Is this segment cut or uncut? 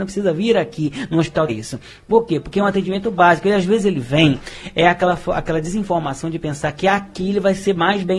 cut